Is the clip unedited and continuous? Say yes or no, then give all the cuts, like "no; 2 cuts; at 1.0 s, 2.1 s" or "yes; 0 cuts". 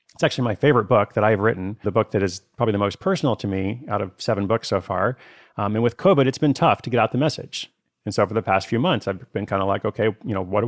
no; 1 cut; at 1.8 s